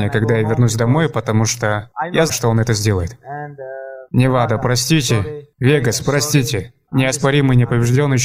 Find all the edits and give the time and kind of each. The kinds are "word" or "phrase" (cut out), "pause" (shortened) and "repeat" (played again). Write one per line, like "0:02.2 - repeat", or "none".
0:02.3 - word
0:05.5 - pause